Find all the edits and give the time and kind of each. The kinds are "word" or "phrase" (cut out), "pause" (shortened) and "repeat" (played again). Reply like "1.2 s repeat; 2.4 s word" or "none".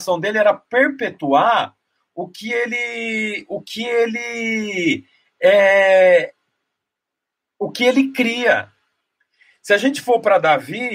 none